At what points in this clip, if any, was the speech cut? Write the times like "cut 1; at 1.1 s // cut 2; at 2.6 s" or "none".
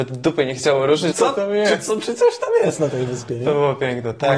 cut 1; at 1.1 s